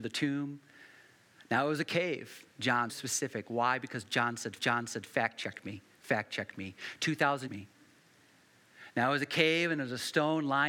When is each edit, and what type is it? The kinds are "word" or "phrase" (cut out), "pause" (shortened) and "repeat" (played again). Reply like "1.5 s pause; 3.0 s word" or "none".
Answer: 2.9 s phrase; 4.6 s repeat; 7.5 s phrase